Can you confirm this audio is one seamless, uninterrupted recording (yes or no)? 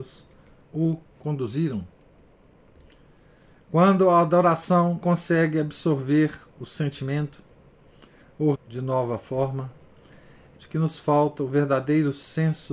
no